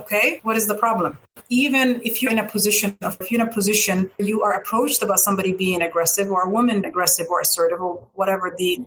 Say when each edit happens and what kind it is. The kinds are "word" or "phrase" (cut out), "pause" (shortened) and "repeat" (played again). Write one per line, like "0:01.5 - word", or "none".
0:02.3 - word
0:03.2 - word
0:04.2 - word
0:06.8 - word